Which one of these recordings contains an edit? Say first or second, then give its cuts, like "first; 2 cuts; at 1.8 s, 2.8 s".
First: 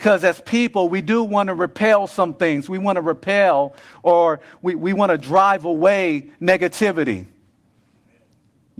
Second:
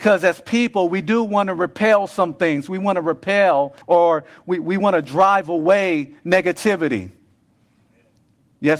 second; 1 cut; at 3.8 s